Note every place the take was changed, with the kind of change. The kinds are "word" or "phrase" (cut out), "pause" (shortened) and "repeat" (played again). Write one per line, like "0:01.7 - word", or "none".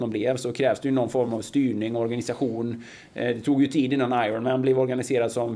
none